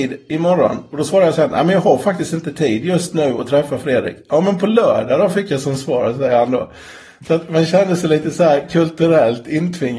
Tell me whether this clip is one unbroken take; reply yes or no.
yes